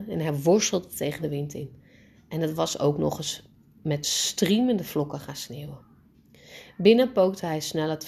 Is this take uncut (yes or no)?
yes